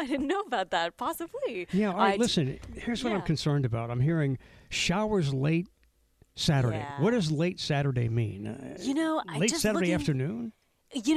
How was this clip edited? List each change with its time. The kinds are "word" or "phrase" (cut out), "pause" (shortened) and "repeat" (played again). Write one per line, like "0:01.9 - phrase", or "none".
none